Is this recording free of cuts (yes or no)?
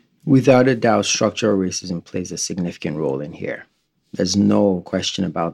yes